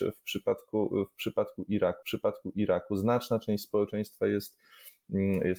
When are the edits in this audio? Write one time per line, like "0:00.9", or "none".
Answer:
0:02.0